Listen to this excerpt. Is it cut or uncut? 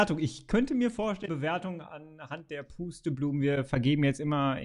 cut